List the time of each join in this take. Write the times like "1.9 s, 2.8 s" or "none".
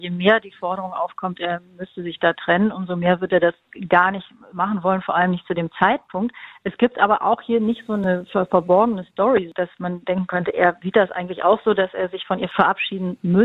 none